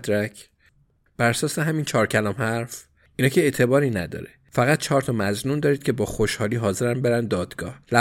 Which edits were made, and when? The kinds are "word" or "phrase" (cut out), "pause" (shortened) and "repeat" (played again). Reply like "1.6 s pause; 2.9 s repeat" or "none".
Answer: none